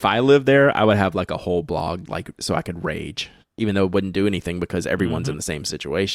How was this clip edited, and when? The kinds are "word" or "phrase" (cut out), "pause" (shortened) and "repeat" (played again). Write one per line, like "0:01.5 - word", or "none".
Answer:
0:02.1 - word

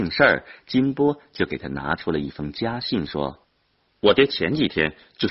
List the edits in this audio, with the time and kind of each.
0:03.4 - pause

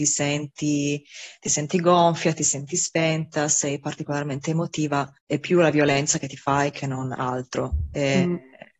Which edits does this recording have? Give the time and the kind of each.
0:05.2 - pause

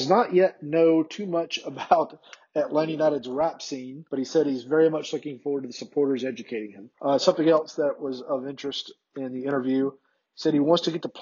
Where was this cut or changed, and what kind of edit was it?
0:04.1 - pause
0:06.9 - pause

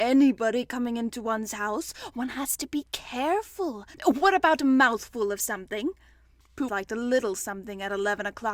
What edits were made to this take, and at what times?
0:03.9 - pause
0:06.7 - word

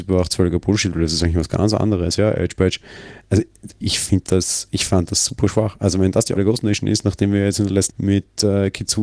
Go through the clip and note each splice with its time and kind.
0:03.8 - word
0:06.4 - word
0:07.9 - phrase

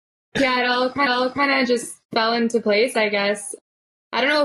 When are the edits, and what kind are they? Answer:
0:01.1 - repeat
0:02.0 - pause

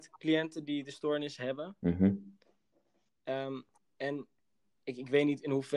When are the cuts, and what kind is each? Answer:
0:03.8 - pause

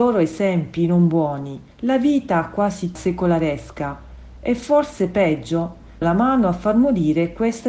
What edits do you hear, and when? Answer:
0:01.7 - pause
0:03.0 - word
0:06.0 - word

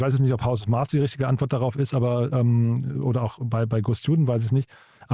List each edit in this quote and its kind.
none

